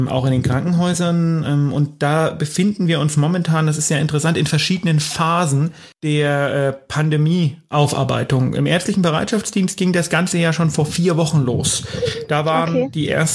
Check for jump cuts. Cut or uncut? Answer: cut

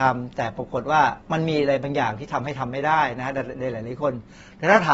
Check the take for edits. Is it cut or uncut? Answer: cut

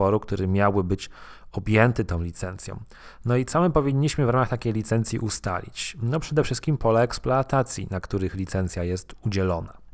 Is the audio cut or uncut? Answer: uncut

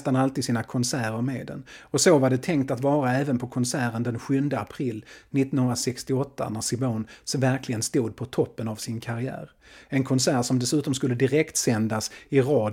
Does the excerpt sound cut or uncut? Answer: uncut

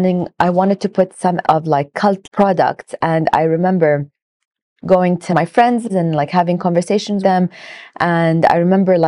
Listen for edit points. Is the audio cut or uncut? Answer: cut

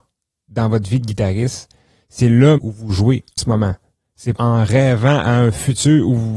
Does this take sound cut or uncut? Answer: cut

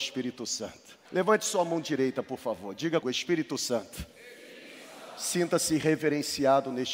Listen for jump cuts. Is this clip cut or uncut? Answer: cut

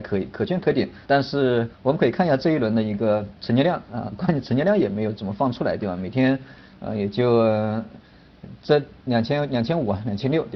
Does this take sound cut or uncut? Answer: cut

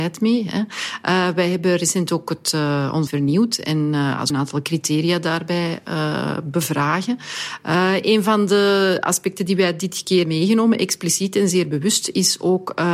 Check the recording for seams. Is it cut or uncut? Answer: cut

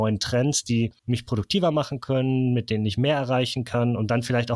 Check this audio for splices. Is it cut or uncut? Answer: cut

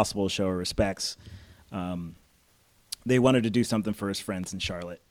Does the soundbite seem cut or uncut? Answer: uncut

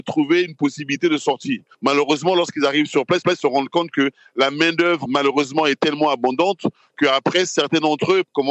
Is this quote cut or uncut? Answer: cut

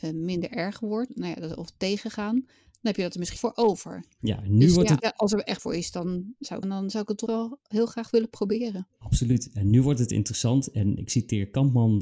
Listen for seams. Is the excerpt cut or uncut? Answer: cut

